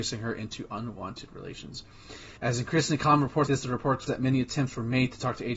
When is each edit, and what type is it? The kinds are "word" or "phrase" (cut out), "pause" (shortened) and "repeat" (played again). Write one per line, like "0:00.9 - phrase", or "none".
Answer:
0:02.4 - pause
0:03.5 - word
0:04.1 - word